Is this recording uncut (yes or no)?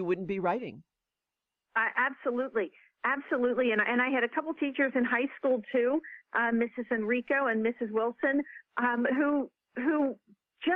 yes